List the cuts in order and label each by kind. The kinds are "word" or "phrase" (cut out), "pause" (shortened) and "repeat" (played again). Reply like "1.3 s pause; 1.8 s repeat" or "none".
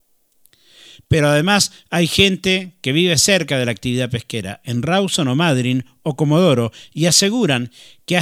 none